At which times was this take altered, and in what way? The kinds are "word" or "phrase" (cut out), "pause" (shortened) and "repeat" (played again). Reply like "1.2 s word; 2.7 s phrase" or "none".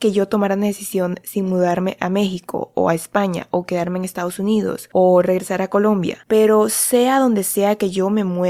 none